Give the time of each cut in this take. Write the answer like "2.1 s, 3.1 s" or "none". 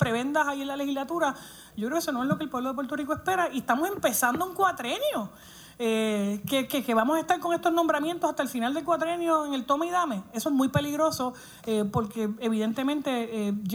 none

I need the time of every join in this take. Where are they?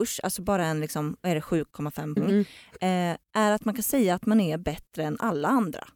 2.2 s

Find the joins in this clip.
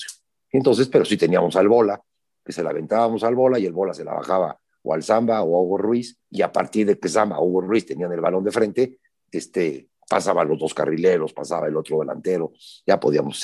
6.2 s

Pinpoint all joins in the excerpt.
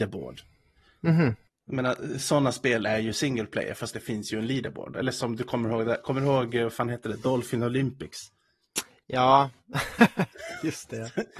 none

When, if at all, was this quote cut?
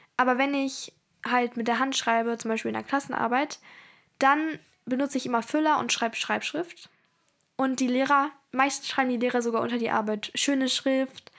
none

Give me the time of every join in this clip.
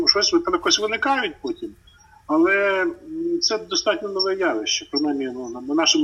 none

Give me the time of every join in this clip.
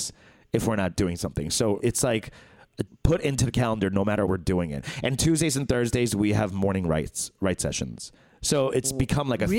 0.9 s, 1.8 s, 2.9 s, 4.3 s

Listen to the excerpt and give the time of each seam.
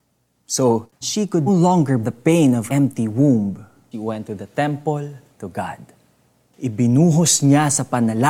1.0 s, 1.5 s, 2.0 s, 2.7 s, 3.9 s, 5.3 s

